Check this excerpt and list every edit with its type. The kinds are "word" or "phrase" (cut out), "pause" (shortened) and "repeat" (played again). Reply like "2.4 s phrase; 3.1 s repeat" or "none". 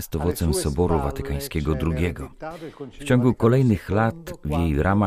none